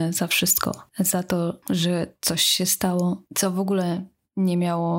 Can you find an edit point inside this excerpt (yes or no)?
no